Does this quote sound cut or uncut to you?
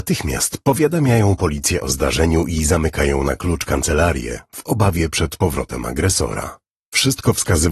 uncut